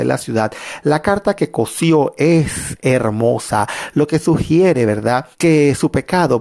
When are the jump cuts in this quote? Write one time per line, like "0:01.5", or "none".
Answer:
0:05.3